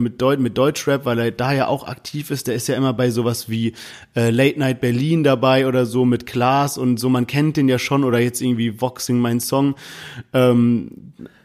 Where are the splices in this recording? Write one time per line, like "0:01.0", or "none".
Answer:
none